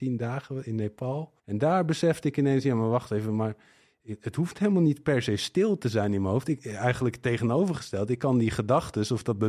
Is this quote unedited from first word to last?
no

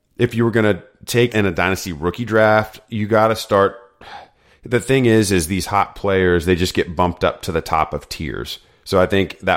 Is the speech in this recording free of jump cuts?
no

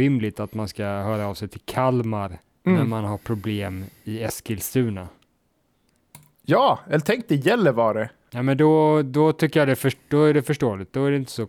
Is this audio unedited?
no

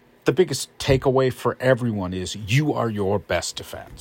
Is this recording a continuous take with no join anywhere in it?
yes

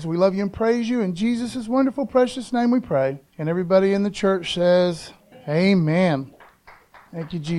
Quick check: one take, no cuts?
no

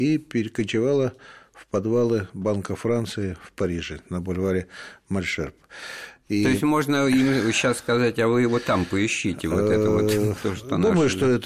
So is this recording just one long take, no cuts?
yes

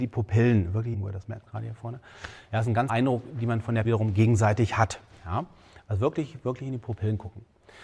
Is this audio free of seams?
no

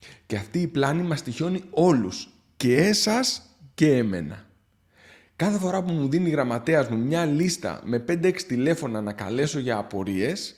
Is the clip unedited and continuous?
yes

